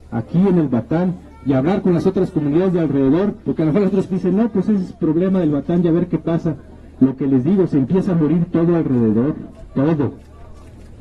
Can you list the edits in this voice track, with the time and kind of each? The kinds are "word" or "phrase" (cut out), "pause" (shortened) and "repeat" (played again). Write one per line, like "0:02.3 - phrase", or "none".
0:03.4 - pause
0:04.1 - word